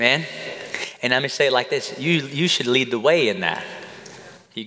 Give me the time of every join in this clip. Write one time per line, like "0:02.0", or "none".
none